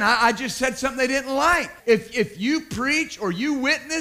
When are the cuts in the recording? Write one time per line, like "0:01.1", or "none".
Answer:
0:01.8

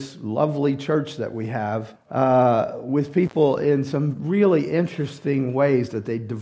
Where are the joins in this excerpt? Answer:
0:02.0

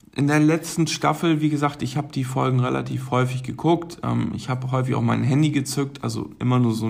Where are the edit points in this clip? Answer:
none

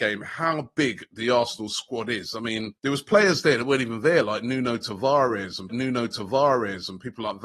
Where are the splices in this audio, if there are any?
0:02.8
0:05.7

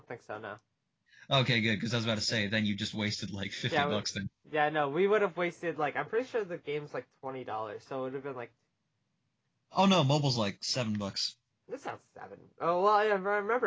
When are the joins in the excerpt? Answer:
none

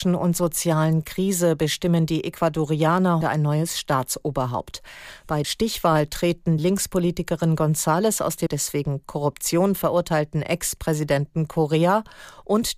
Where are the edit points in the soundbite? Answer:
0:03.2
0:05.4
0:06.6
0:08.5

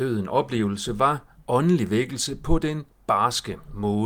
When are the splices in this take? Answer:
none

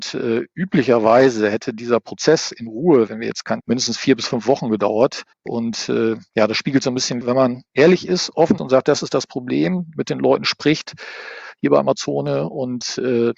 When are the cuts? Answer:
0:03.1
0:03.6
0:05.3
0:07.2
0:07.7
0:08.6

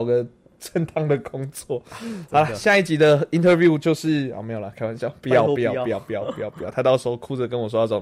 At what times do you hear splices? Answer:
none

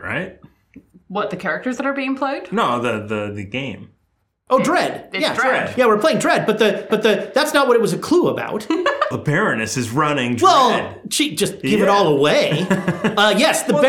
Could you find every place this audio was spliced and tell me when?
0:06.9
0:09.1

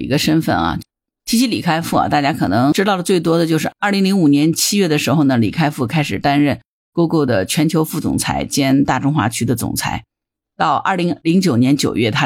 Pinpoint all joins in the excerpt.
none

